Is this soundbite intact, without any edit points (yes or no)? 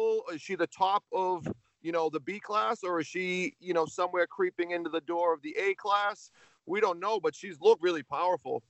no